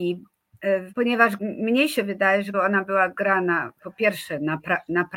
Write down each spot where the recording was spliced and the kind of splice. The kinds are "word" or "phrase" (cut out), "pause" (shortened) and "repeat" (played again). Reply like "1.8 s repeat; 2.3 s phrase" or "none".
0.9 s word; 1.4 s word; 2.5 s word